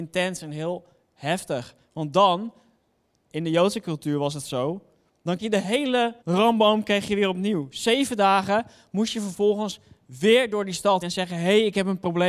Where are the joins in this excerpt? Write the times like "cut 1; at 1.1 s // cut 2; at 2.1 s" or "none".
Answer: cut 1; at 5.4 s // cut 2; at 6.2 s // cut 3; at 11.0 s